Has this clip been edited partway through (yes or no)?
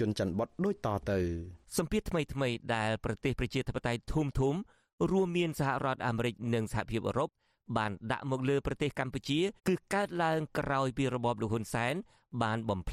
yes